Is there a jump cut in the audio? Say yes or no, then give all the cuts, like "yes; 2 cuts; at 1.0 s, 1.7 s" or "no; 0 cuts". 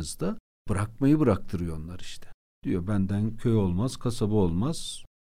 no; 0 cuts